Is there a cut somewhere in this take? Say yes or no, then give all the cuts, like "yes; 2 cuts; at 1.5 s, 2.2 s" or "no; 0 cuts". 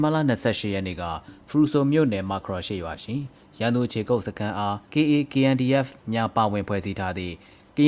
yes; 1 cut; at 4.8 s